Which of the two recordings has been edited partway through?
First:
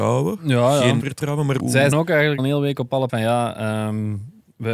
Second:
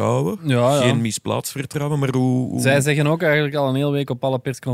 first; 5 cuts; at 1.0 s, 1.6 s, 1.9 s, 2.4 s, 3.1 s

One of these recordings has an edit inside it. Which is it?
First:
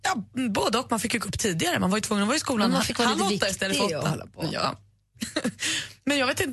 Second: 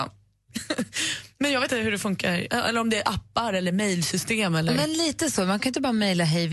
second; 1 cut; at 1.7 s

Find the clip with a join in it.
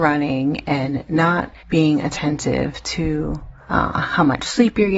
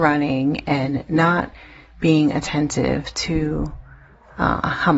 first; 2 cuts; at 1.6 s, 3.6 s

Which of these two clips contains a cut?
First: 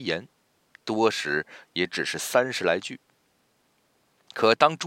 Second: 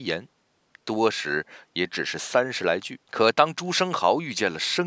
second; 1 cut; at 3.1 s

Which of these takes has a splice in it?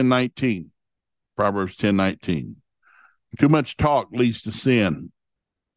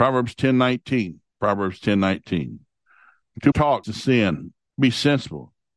second; 4 cuts; at 1.3 s, 3.5 s, 3.8 s, 4.7 s

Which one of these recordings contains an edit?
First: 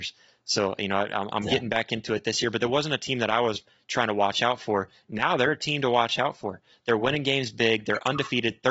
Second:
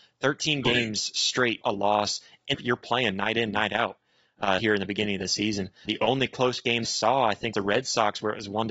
second; 6 cuts; at 1.6 s, 2.5 s, 4.6 s, 5.9 s, 6.8 s, 7.5 s

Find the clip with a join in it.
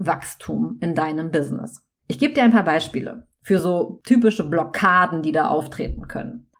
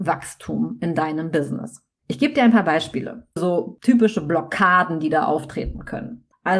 second; 1 cut; at 3.4 s

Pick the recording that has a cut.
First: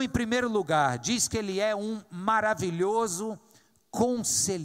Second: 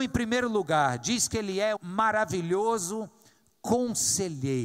second; 1 cut; at 1.8 s

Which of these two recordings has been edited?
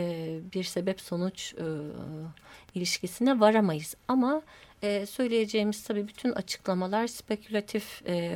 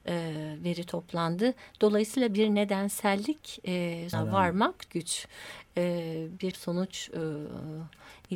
second; 3 cuts; at 4.1 s, 4.9 s, 6.5 s

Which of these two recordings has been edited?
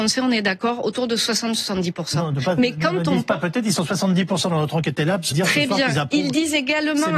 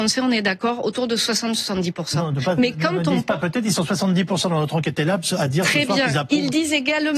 first; 1 cut; at 5.3 s

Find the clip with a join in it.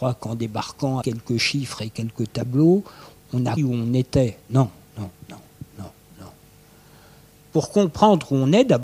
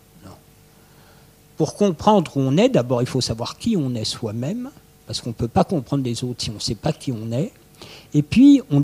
first; 4 cuts; at 1.0 s, 3.6 s, 4.9 s, 5.6 s

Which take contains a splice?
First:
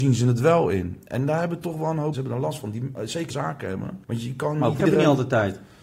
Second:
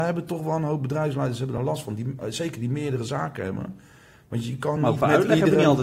first; 4 cuts; at 2.1 s, 3.3 s, 4.0 s, 4.8 s

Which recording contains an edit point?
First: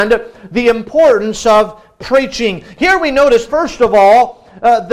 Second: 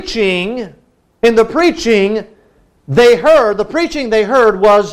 first; 1 cut; at 3.5 s

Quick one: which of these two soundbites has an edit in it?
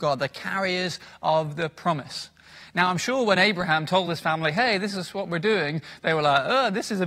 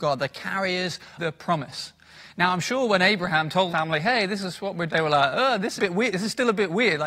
second; 4 cuts; at 1.2 s, 3.7 s, 4.9 s, 5.8 s

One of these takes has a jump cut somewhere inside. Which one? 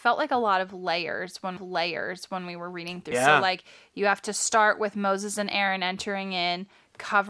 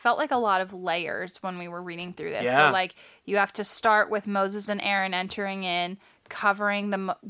first; 2 cuts; at 1.6 s, 3.1 s

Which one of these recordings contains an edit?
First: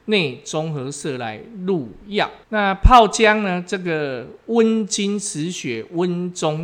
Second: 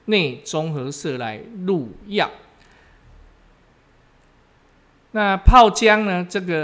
first; 1 cut; at 2.4 s

